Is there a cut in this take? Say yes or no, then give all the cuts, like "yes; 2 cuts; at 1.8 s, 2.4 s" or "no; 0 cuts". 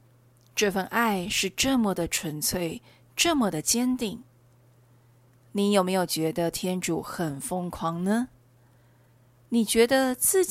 no; 0 cuts